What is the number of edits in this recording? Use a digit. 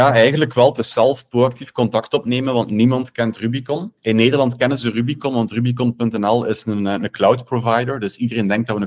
1